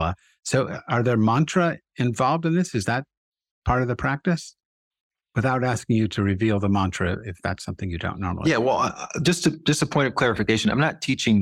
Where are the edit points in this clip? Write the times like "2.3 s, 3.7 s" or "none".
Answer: none